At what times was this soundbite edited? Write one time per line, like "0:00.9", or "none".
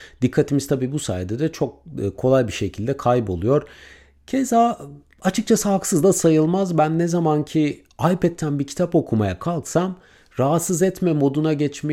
none